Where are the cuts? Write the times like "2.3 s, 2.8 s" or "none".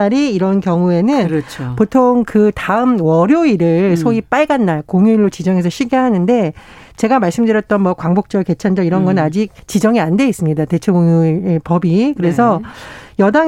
none